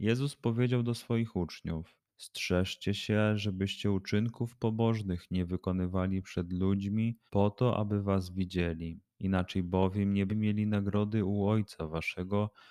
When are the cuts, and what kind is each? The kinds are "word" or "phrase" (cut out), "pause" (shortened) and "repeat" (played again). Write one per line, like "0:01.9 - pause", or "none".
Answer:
0:02.1 - pause
0:07.3 - pause
0:10.3 - word